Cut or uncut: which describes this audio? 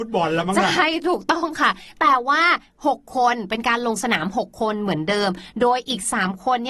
uncut